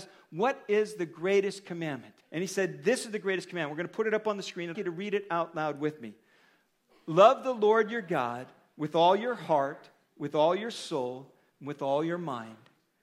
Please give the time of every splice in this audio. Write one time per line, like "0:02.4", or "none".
0:02.2
0:04.7